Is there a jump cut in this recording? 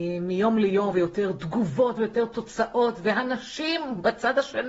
yes; 2 cuts; at 0.9 s, 2.0 s

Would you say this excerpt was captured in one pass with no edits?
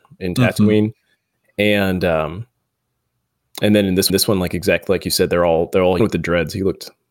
no; 2 cuts; at 4.1 s, 6.0 s

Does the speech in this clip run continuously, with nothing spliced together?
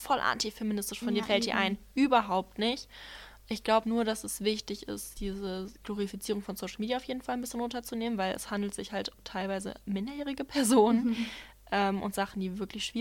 no; 3 cuts; at 1.2 s, 3.8 s, 9.1 s

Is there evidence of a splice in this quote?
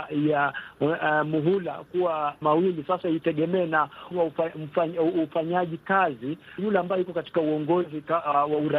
yes; 3 cuts; at 2.4 s, 4.1 s, 6.6 s

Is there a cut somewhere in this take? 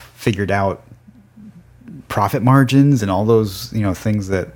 no; 0 cuts

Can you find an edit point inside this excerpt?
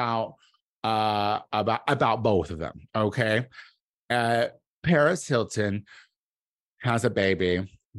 no; 0 cuts

